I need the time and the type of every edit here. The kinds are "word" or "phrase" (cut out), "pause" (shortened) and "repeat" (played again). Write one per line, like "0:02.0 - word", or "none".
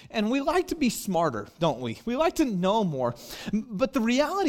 none